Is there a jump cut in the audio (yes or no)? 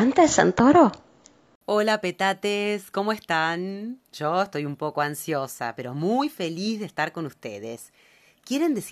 yes